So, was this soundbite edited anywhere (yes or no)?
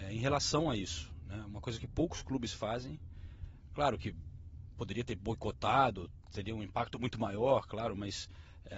no